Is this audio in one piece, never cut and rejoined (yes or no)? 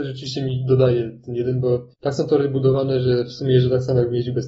no